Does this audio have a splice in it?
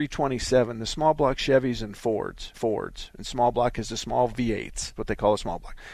yes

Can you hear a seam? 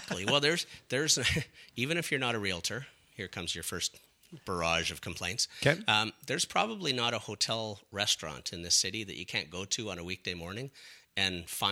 no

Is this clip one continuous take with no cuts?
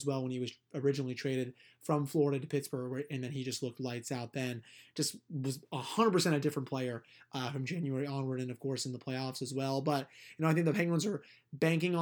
yes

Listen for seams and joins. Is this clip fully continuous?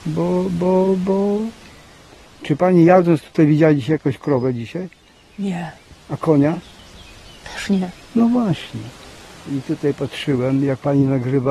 yes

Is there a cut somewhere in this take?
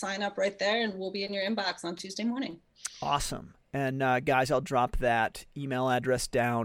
no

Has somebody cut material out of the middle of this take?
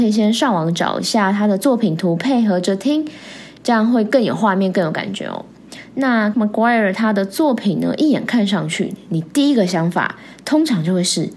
yes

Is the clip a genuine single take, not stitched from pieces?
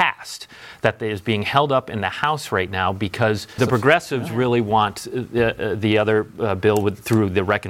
no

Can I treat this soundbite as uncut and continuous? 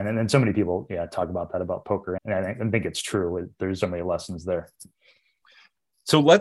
no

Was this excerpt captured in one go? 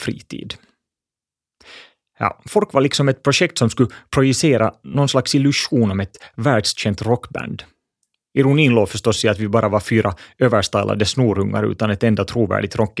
yes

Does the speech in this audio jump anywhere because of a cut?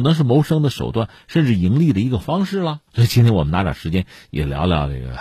yes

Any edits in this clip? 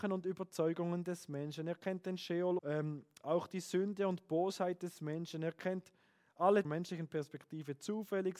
yes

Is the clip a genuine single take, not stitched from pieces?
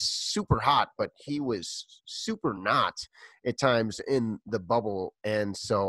yes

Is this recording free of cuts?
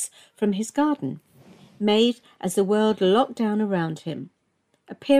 yes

